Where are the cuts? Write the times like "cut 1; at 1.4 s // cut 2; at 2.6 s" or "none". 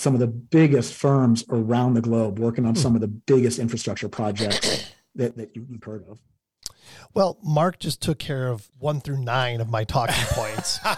cut 1; at 5.8 s // cut 2; at 8.7 s